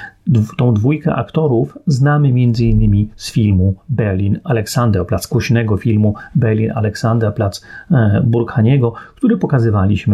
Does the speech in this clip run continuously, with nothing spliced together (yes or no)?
yes